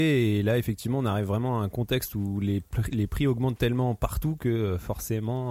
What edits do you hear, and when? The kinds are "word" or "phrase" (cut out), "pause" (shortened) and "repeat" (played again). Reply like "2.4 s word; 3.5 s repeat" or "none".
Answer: none